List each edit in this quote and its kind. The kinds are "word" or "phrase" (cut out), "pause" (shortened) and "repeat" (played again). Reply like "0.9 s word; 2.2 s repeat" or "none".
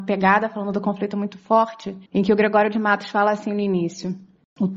2.1 s pause